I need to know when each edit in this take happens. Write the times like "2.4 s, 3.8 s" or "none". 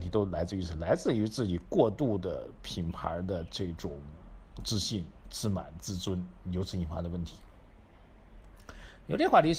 none